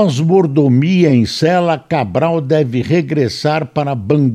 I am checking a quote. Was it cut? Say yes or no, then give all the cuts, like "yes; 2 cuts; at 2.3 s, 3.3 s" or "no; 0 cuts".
no; 0 cuts